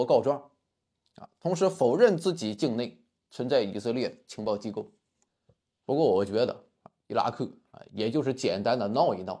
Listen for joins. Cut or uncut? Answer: cut